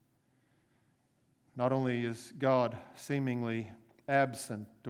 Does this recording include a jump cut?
no; 0 cuts

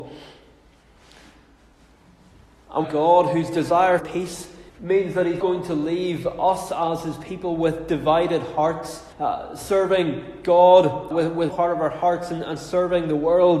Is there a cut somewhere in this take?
yes; 7 cuts; at 2.8 s, 4.0 s, 4.7 s, 5.4 s, 9.1 s, 11.1 s, 11.5 s

